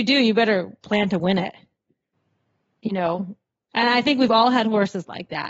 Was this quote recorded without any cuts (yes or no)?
yes